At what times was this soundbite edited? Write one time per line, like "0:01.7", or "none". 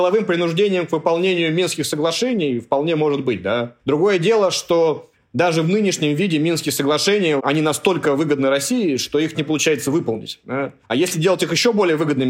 0:03.8
0:09.3
0:10.8